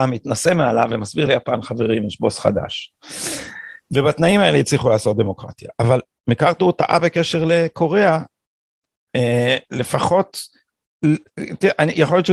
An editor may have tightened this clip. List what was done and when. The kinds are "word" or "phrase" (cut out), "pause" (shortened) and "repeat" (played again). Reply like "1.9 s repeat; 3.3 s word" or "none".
none